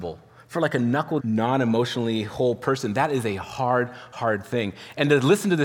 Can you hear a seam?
yes; 1 cut; at 1.2 s

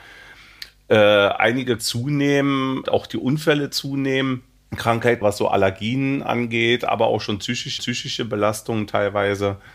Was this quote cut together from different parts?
yes; 4 cuts; at 1.8 s, 2.9 s, 5.2 s, 7.8 s

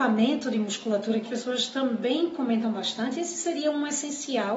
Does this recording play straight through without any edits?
no; 1 cut; at 1.3 s

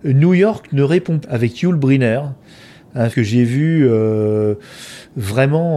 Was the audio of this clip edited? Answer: yes; 2 cuts; at 1.2 s, 3.1 s

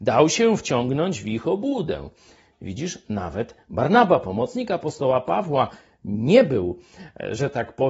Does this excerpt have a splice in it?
no; 0 cuts

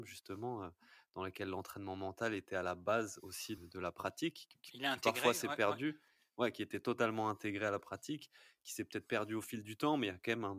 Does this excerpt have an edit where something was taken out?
yes; 1 cut; at 3.6 s

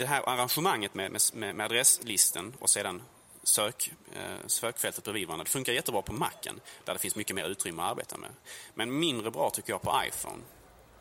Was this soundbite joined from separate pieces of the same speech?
no; 0 cuts

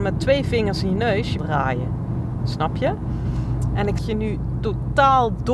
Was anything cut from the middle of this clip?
yes; 2 cuts; at 1.4 s, 4.0 s

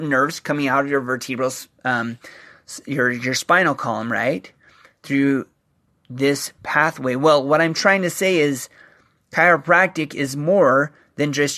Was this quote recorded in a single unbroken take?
yes; 0 cuts

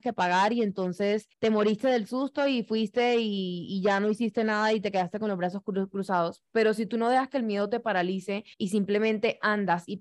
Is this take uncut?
no; 2 cuts; at 1.3 s, 8.5 s

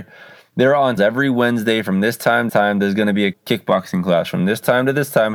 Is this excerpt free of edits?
no; 3 cuts; at 1.0 s, 2.5 s, 3.3 s

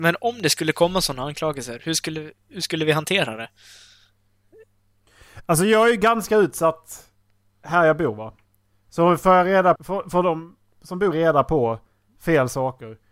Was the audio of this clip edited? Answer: yes; 2 cuts; at 9.8 s, 11.1 s

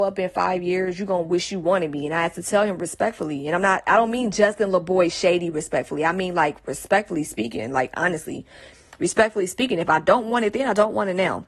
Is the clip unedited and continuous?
yes; 0 cuts

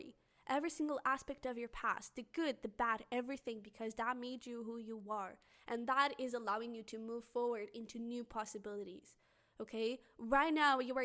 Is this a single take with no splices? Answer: yes; 0 cuts

